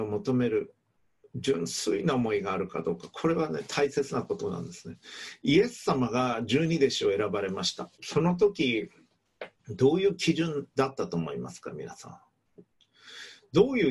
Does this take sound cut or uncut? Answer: cut